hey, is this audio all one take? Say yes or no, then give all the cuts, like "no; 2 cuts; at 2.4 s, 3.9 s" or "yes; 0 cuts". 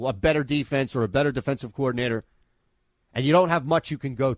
yes; 0 cuts